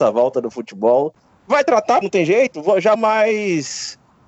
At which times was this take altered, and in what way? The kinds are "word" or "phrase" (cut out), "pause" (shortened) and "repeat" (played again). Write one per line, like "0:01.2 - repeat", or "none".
0:02.0 - word
0:02.9 - word